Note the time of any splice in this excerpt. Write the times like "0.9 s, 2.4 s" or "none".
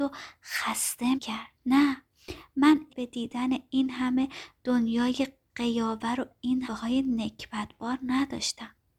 1.1 s, 1.6 s, 2.9 s, 6.7 s